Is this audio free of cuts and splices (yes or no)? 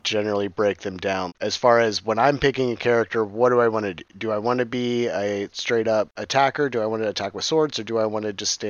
no